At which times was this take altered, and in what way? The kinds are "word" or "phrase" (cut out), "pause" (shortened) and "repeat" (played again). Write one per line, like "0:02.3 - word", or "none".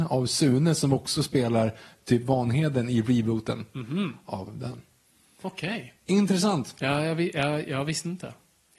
none